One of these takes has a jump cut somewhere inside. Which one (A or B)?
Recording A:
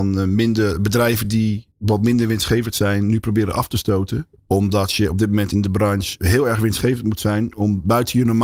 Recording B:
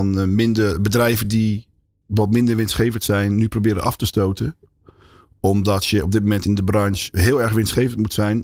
A